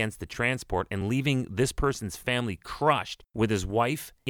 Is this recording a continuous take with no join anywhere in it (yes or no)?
yes